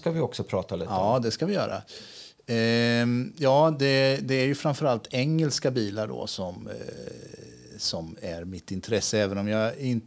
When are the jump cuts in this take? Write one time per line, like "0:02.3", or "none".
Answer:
none